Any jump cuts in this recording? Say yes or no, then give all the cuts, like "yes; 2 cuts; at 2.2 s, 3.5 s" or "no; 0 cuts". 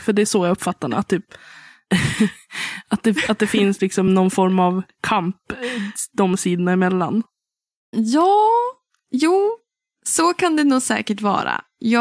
no; 0 cuts